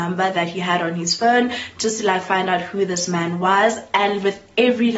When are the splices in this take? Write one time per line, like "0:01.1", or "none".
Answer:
none